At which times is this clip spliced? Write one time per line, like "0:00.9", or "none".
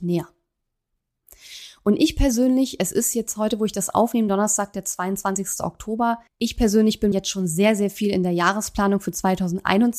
0:06.3
0:07.1